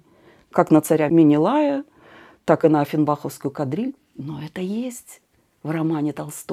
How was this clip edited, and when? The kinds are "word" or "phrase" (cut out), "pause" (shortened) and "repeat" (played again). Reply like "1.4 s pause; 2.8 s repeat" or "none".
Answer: none